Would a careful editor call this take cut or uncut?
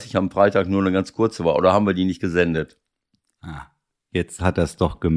uncut